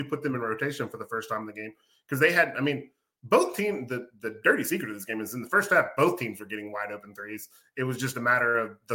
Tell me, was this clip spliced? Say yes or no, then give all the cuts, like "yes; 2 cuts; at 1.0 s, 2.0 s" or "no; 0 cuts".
no; 0 cuts